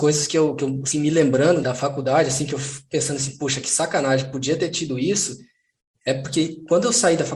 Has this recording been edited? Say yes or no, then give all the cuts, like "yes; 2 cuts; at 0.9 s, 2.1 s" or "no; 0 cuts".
yes; 1 cut; at 1.6 s